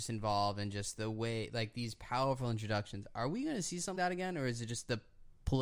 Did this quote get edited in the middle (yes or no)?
yes